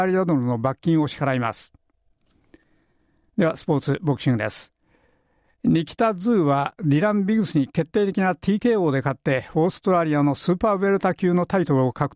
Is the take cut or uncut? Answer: uncut